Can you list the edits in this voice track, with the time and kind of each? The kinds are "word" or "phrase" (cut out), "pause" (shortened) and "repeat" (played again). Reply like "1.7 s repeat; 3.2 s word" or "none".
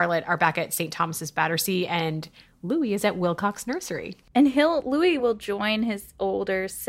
none